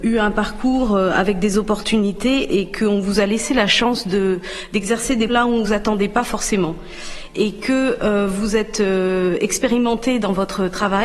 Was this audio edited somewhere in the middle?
yes; 2 cuts; at 5.3 s, 5.6 s

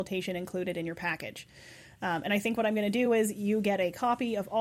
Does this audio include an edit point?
no; 0 cuts

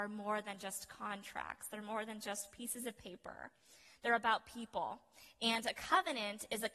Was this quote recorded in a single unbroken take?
yes; 0 cuts

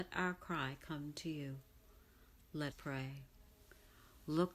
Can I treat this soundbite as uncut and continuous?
no; 1 cut; at 2.7 s

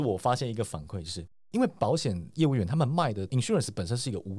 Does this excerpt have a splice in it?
no; 0 cuts

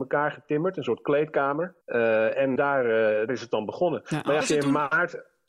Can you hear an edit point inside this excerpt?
yes; 4 cuts; at 1.8 s, 2.6 s, 3.3 s, 4.4 s

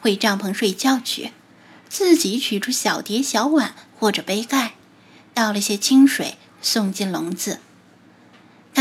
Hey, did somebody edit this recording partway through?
no; 0 cuts

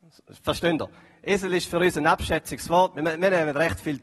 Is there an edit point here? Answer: no; 0 cuts

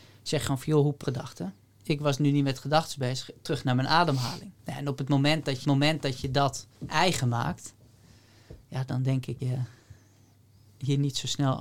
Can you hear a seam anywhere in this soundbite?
yes; 6 cuts; at 1.0 s, 4.6 s, 5.6 s, 6.7 s, 8.6 s, 9.4 s

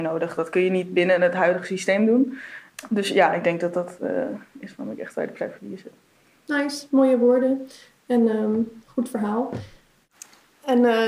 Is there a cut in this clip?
no; 0 cuts

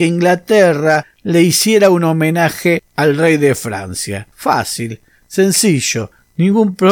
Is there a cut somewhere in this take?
no; 0 cuts

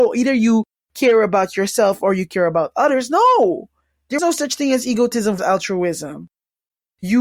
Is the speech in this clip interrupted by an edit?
yes; 2 cuts; at 4.2 s, 5.4 s

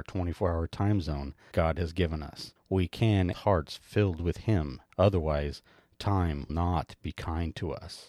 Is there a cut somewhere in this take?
yes; 5 cuts; at 1.5 s, 2.6 s, 3.3 s, 4.9 s, 6.5 s

